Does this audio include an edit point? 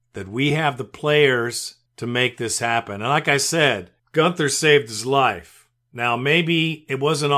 yes; 2 cuts; at 1.9 s, 4.0 s

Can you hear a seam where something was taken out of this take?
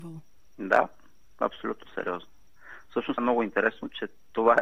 yes; 1 cut; at 3.2 s

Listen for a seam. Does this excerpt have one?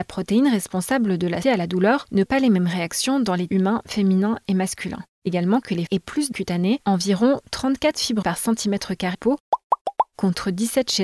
yes; 8 cuts; at 1.4 s, 2.3 s, 3.5 s, 5.3 s, 5.9 s, 6.3 s, 8.2 s, 9.1 s

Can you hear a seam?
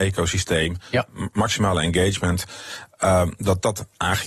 no; 0 cuts

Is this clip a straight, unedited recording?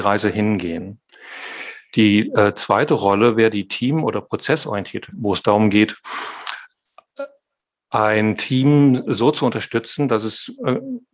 no; 2 cuts; at 5.1 s, 9.0 s

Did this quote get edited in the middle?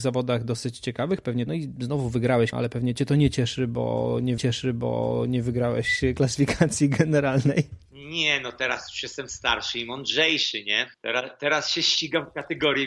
yes; 5 cuts; at 1.5 s, 2.5 s, 4.4 s, 7.9 s, 10.9 s

